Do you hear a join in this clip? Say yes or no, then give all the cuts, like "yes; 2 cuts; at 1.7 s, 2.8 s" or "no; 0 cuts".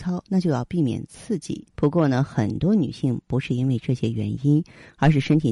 yes; 1 cut; at 1.7 s